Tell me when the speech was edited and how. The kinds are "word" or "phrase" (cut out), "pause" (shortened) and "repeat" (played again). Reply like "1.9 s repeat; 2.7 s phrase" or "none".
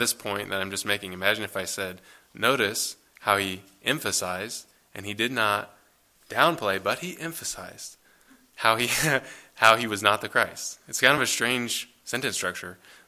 none